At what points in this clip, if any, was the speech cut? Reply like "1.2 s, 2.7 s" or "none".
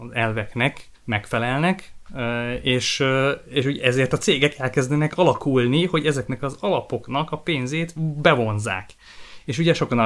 1.0 s